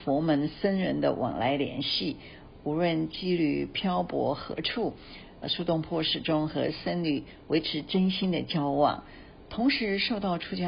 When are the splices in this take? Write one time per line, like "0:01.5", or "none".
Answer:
0:05.4